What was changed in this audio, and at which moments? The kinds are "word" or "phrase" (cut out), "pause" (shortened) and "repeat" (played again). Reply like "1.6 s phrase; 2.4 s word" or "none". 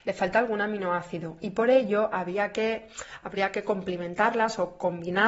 none